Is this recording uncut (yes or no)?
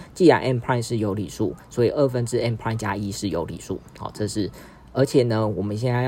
yes